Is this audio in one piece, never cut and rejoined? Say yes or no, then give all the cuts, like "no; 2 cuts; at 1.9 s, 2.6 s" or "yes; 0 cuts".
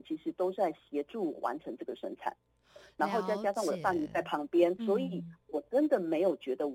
no; 1 cut; at 4.8 s